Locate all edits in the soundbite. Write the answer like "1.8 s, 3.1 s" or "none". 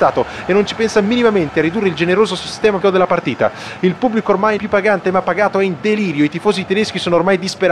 2.8 s, 4.6 s